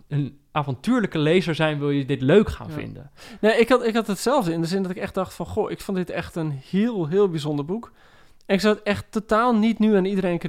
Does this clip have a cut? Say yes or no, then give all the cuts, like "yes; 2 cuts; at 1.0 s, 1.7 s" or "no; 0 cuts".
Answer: no; 0 cuts